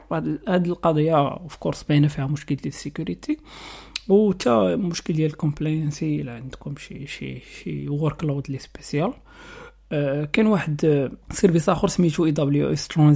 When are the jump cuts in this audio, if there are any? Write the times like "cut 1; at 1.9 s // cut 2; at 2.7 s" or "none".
cut 1; at 11.2 s